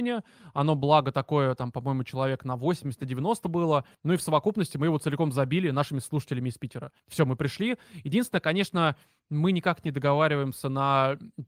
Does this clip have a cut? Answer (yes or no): yes